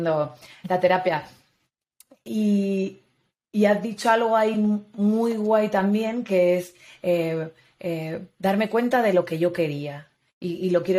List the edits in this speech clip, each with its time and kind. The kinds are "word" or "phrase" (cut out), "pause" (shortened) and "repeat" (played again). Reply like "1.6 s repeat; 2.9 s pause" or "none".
none